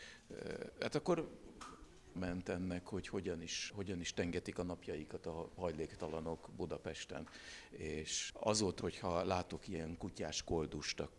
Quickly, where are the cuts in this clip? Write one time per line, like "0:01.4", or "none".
0:02.2
0:03.7
0:08.3
0:08.8